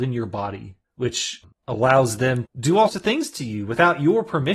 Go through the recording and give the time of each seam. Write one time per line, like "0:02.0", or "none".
0:02.5
0:02.9